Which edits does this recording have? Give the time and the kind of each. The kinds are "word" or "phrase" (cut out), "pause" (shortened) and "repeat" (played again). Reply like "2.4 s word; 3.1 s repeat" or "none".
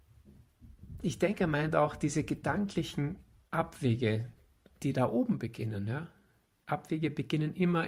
none